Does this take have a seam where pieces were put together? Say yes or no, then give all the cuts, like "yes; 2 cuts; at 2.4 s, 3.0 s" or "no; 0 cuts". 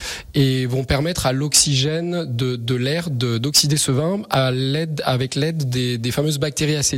no; 0 cuts